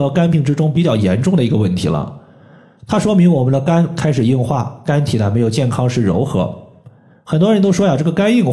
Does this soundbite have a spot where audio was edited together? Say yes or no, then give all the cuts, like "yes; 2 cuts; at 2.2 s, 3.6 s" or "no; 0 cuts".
no; 0 cuts